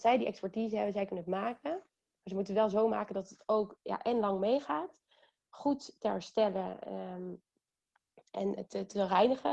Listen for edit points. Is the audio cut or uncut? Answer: cut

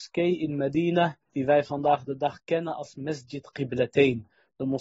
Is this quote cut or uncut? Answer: cut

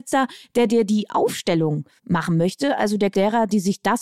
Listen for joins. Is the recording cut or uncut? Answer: cut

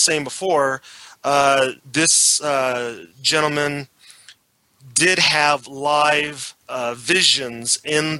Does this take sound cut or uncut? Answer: cut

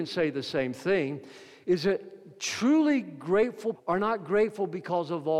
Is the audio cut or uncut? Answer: cut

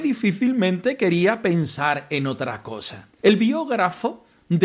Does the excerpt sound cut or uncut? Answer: cut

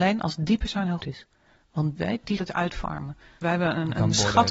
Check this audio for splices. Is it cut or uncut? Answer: cut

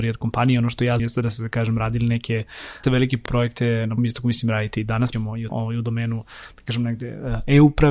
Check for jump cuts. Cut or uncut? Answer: cut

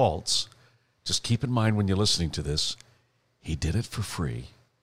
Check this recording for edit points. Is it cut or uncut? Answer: uncut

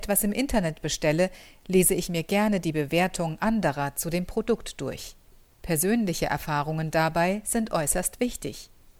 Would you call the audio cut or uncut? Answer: cut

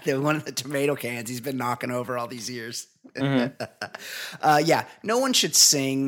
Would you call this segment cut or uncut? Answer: uncut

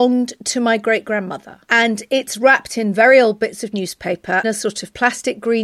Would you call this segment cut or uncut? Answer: cut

